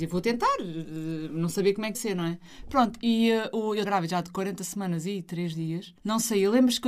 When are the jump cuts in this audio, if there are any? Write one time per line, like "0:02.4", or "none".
0:01.9
0:03.8
0:06.0